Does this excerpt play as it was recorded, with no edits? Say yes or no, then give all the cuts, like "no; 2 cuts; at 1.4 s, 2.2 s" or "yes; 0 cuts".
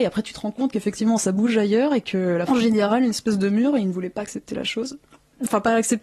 no; 1 cut; at 2.5 s